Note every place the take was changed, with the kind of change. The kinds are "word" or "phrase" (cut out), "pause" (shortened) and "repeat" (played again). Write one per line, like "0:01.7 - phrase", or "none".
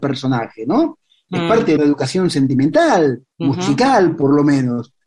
0:01.8 - word
0:03.3 - pause